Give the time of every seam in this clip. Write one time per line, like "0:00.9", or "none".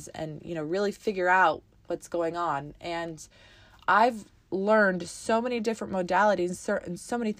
none